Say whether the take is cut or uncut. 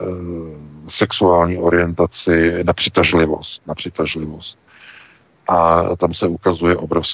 uncut